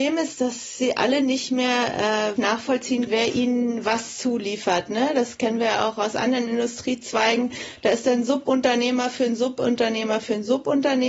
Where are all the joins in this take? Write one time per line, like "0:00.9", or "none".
0:02.4
0:03.1